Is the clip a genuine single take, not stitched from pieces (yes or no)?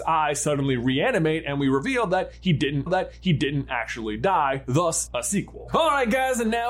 no